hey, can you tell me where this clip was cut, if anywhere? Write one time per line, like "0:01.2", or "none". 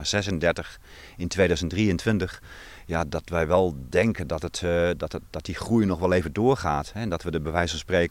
none